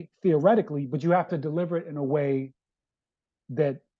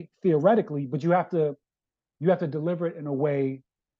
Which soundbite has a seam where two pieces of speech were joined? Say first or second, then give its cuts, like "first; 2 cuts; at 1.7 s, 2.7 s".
first; 1 cut; at 1.3 s